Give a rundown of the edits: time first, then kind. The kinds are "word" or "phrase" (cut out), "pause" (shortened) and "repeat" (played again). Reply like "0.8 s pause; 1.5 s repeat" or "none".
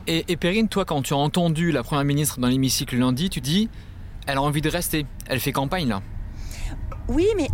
3.4 s word